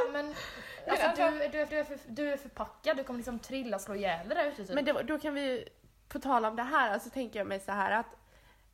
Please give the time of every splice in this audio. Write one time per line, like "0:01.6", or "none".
0:01.7
0:05.9